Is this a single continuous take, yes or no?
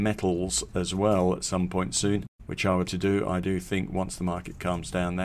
no